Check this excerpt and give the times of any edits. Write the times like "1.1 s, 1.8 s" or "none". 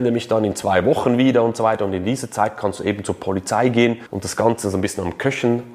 none